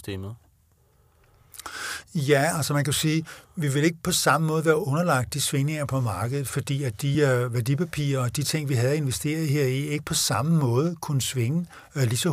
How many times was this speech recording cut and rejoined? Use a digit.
0